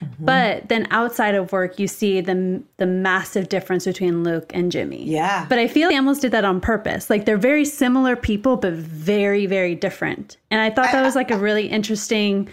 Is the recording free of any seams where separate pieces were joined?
no; 1 cut; at 5.9 s

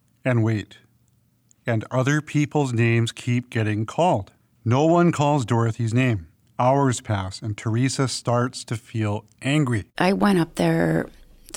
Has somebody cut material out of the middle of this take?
yes; 3 cuts; at 4.4 s, 6.3 s, 9.9 s

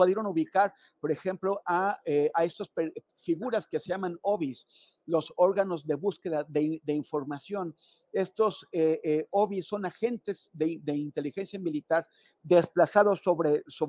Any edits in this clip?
no; 0 cuts

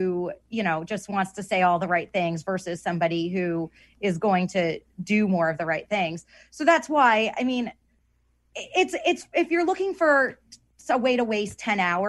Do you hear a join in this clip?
no; 0 cuts

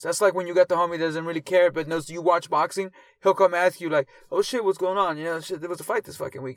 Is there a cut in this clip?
no; 0 cuts

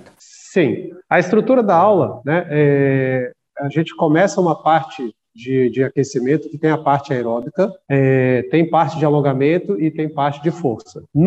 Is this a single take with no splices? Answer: yes; 0 cuts

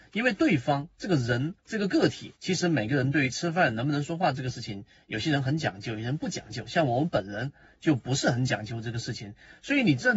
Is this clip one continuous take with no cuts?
no; 2 cuts; at 1.6 s, 2.4 s

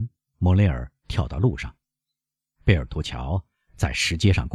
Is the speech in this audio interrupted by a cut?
no; 0 cuts

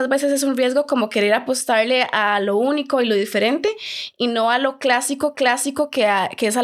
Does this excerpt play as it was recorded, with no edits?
no; 1 cut; at 5.3 s

